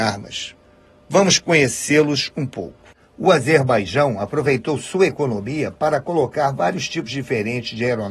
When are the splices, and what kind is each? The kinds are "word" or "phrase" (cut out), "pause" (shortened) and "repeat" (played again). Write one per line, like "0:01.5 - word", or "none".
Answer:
none

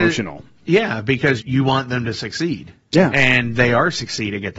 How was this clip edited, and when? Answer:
0:01.4 - word

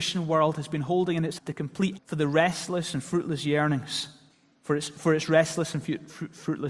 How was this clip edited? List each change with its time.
0:01.4 - word
0:02.0 - word

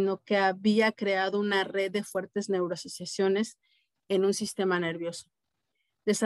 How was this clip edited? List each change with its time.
none

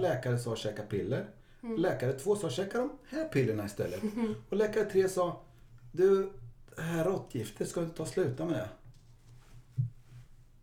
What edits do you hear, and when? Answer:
none

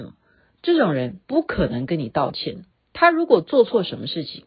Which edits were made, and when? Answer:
0:01.2 - pause
0:02.7 - pause

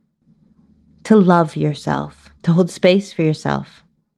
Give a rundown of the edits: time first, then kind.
0:02.4 - pause

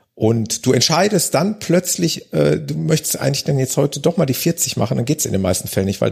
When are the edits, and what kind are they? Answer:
none

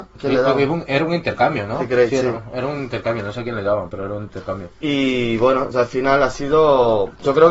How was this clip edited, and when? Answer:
0:05.7 - word

